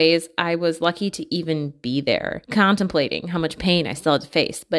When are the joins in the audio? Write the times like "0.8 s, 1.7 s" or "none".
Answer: 2.4 s

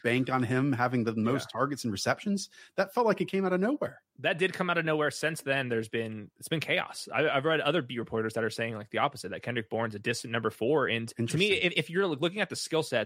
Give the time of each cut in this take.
4.1 s

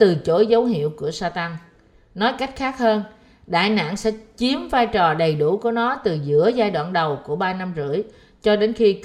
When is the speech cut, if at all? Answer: none

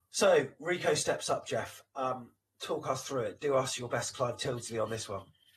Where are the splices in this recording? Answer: none

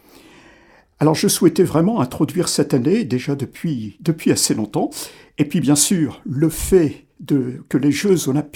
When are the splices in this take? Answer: none

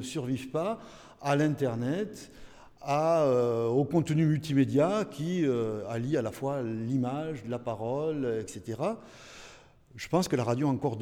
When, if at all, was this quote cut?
none

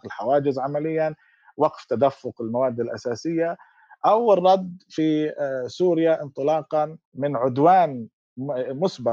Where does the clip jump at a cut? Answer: 7.0 s

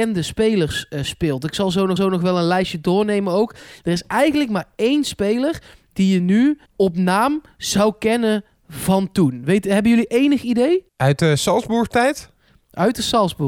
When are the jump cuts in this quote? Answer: 2.0 s, 6.7 s, 10.9 s

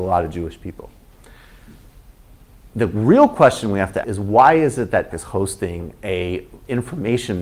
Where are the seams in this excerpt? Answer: 4.0 s, 5.1 s

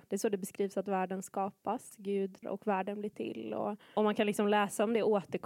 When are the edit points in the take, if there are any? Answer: 2.4 s, 4.0 s

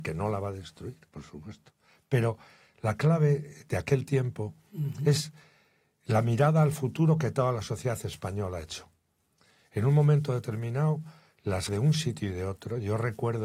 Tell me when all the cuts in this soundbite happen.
11.7 s

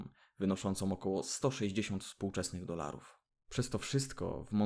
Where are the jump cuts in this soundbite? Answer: none

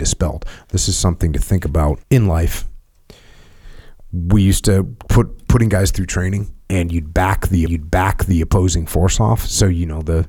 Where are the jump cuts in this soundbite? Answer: 2.0 s, 6.6 s, 7.7 s

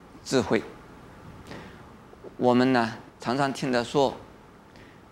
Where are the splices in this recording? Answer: 3.1 s

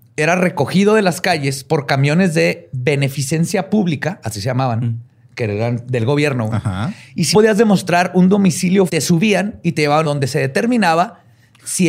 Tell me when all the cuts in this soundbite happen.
7.3 s, 8.9 s, 10.0 s

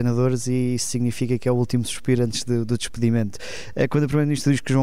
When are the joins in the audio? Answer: none

